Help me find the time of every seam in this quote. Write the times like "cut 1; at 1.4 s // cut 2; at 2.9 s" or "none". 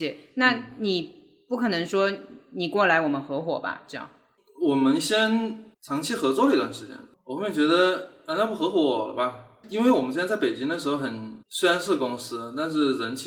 cut 1; at 5.7 s // cut 2; at 11.4 s